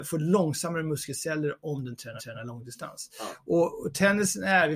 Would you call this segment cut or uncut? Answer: cut